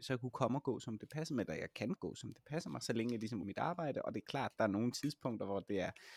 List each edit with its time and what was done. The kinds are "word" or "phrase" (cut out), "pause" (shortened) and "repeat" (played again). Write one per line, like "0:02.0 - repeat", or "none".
0:02.0 - word
0:03.4 - word